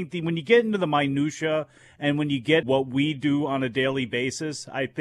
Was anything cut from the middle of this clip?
yes; 1 cut; at 2.6 s

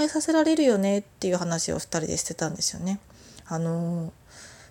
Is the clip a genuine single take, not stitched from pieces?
yes; 0 cuts

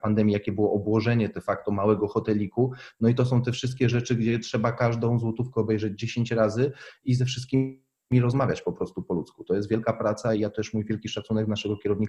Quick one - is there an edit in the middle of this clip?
no; 0 cuts

